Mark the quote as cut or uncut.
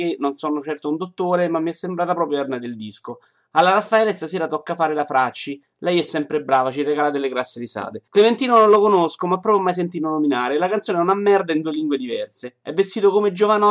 cut